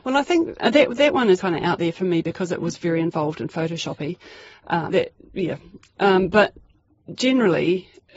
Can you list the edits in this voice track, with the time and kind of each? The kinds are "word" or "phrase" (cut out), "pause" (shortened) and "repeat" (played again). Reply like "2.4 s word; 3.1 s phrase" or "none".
1.4 s word; 4.9 s word